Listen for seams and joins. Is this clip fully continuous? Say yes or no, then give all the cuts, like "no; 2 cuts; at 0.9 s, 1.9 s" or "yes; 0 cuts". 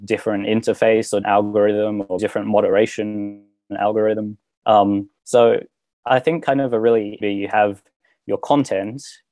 no; 4 cuts; at 1.2 s, 2.2 s, 5.2 s, 7.2 s